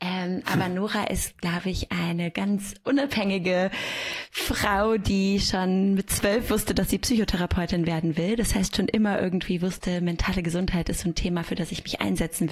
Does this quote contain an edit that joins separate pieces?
no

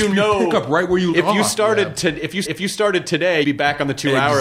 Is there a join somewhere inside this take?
yes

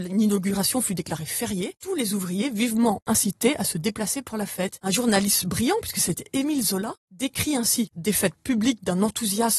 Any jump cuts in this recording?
no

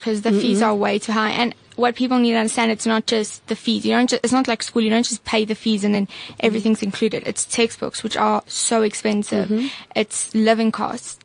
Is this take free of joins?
yes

